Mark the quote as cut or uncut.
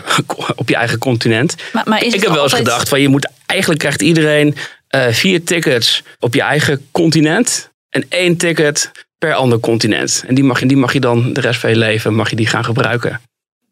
cut